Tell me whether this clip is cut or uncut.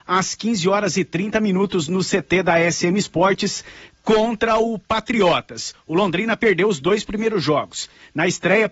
uncut